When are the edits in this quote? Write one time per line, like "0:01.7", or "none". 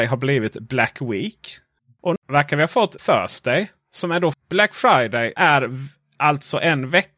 0:02.2
0:03.0
0:04.3
0:05.4